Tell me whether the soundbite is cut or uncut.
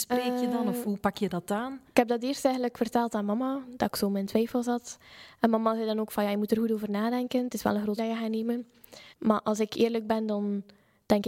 cut